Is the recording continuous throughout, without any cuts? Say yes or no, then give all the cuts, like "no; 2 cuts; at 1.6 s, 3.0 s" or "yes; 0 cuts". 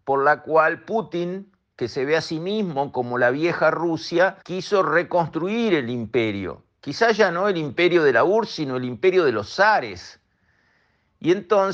no; 1 cut; at 4.4 s